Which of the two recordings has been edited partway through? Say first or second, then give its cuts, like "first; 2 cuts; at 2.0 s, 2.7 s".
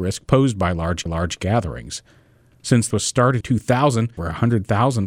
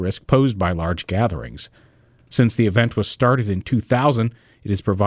first; 4 cuts; at 1.1 s, 2.9 s, 3.4 s, 4.2 s